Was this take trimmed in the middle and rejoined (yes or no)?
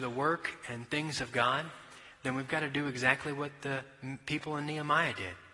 no